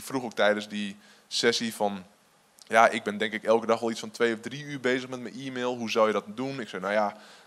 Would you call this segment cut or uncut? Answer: uncut